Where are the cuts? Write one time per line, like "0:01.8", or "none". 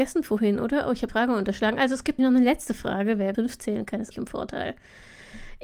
0:01.1
0:02.2
0:03.3
0:04.1